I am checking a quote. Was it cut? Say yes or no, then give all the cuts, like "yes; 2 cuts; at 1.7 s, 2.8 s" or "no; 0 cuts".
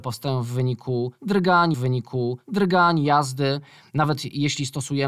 yes; 1 cut; at 1.7 s